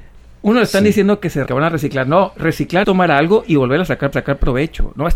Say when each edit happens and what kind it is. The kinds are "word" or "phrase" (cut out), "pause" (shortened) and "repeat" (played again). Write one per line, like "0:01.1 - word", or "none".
0:01.5 - word
0:02.8 - word
0:04.1 - repeat